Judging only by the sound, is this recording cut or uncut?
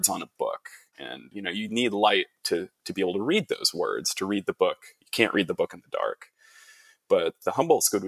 uncut